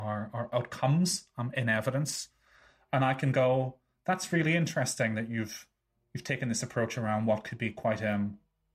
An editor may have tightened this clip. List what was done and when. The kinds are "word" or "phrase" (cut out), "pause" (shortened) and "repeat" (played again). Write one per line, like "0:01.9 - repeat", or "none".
none